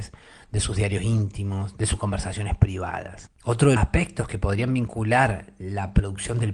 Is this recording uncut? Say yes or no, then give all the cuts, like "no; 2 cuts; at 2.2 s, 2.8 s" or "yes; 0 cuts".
no; 2 cuts; at 3.4 s, 3.8 s